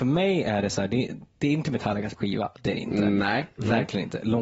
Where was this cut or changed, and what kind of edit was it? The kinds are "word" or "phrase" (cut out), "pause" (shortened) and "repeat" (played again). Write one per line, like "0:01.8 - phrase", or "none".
0:02.2 - word